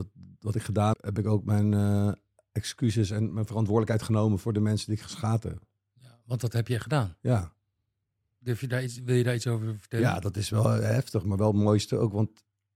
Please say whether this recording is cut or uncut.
cut